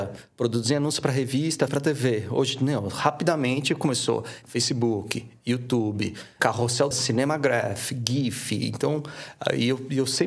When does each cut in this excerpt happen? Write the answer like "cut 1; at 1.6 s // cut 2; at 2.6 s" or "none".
cut 1; at 1.7 s // cut 2; at 4.4 s // cut 3; at 6.4 s // cut 4; at 6.9 s